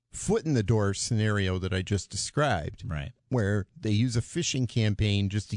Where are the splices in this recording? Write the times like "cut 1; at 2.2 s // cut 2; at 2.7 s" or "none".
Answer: cut 1; at 3.2 s

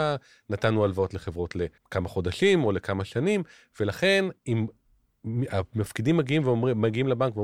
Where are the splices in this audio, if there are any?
cut 1; at 1.8 s // cut 2; at 4.4 s

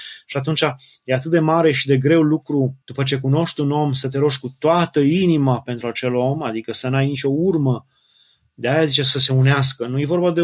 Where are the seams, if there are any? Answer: cut 1; at 2.8 s

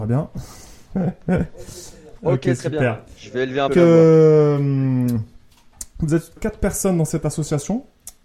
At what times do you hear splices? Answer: cut 1; at 3.7 s // cut 2; at 6.4 s

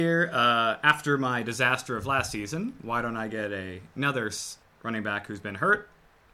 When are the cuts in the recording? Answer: cut 1; at 4.6 s

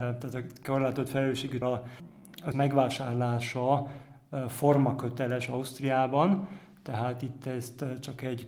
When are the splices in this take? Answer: cut 1; at 1.6 s // cut 2; at 2.5 s

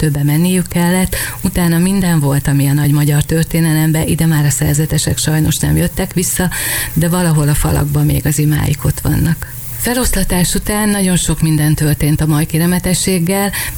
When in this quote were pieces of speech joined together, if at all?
none

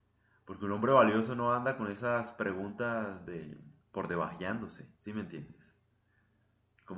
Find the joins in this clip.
cut 1; at 3.8 s // cut 2; at 5.0 s

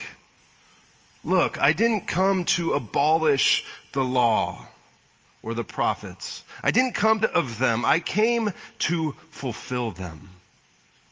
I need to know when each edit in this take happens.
cut 1; at 7.2 s

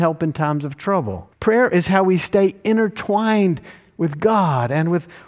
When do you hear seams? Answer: cut 1; at 1.3 s

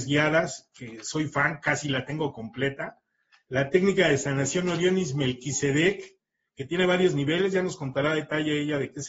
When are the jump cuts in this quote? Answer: none

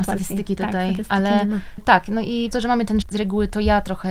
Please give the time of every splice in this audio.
cut 1; at 1.8 s // cut 2; at 2.5 s // cut 3; at 3.0 s

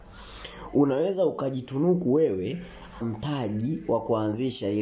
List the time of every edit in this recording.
cut 1; at 3.0 s

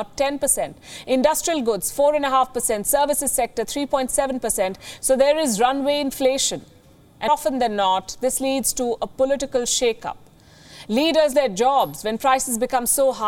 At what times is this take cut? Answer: cut 1; at 7.3 s // cut 2; at 11.3 s

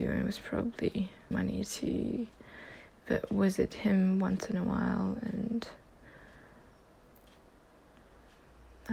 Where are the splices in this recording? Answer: cut 1; at 1.3 s

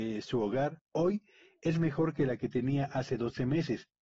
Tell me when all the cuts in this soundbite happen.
none

